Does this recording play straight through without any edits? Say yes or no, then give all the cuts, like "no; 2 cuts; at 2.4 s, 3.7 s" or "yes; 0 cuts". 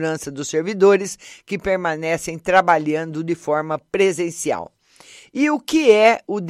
yes; 0 cuts